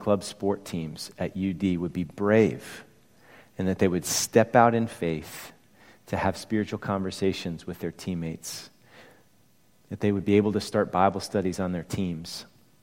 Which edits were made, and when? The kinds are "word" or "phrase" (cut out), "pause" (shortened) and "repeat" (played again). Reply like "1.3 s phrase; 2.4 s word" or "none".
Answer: none